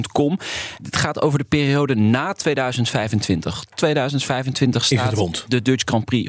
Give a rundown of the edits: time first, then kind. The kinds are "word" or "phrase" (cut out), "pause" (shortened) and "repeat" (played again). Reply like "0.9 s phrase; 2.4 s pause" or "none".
3.7 s word